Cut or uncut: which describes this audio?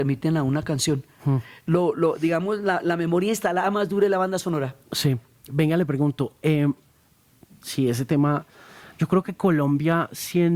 uncut